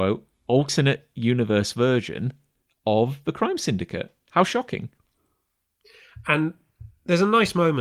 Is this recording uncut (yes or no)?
yes